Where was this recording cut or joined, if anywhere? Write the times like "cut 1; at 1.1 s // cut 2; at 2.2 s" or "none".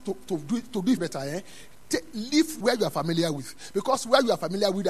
cut 1; at 1.0 s // cut 2; at 2.6 s